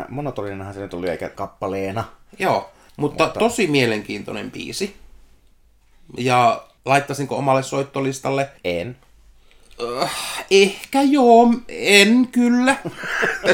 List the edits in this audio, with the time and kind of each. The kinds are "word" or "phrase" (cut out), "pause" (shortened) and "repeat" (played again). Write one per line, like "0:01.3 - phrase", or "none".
0:01.3 - phrase
0:02.9 - pause
0:06.8 - pause
0:08.6 - pause